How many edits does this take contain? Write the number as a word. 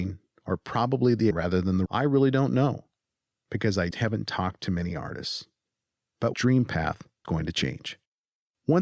five